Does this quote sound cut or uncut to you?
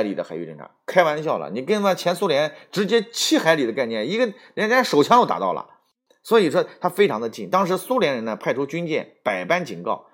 uncut